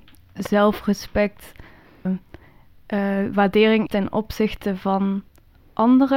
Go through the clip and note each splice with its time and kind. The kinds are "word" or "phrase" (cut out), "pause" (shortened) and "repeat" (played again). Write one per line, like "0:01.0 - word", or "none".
0:02.0 - word
0:03.9 - word